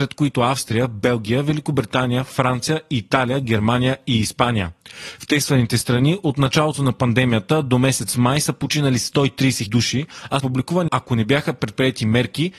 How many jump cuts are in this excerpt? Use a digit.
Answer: 3